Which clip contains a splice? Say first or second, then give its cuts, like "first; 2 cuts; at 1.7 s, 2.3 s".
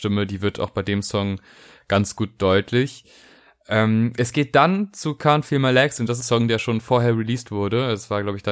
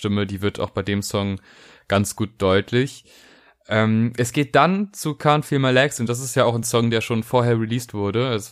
first; 1 cut; at 6.2 s